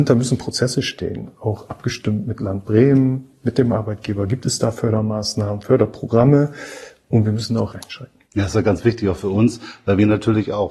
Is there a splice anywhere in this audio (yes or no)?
yes